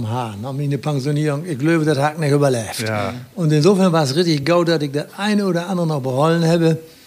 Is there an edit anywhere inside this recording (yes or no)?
no